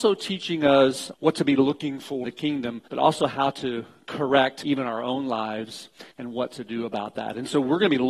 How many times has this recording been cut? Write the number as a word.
five